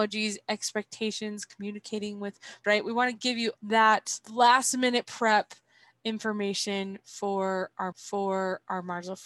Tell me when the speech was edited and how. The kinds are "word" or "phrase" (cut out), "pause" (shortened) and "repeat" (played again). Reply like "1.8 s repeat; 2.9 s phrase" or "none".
2.6 s word; 3.6 s word; 4.2 s pause; 7.9 s repeat